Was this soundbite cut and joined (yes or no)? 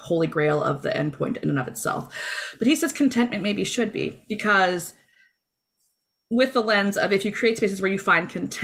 no